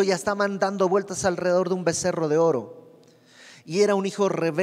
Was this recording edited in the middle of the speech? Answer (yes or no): no